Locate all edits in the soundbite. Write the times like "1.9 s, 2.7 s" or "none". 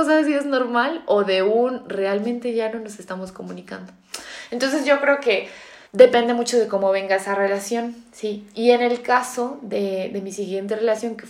5.8 s